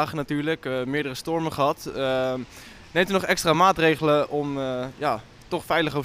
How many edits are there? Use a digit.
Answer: 0